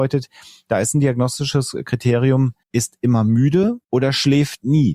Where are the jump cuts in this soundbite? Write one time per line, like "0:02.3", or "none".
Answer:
0:02.6
0:03.8

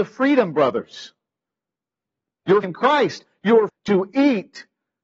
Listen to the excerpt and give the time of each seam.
0:02.6
0:03.7

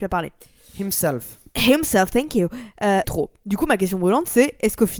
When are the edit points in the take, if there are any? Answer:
0:03.0

